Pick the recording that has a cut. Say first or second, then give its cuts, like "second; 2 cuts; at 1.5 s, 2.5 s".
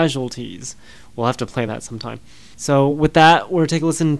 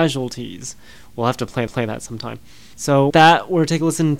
second; 2 cuts; at 1.7 s, 3.1 s